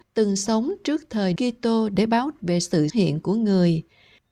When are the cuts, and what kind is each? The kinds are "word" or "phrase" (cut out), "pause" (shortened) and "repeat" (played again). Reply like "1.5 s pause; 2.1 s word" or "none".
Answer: 1.4 s word; 2.4 s word; 2.9 s word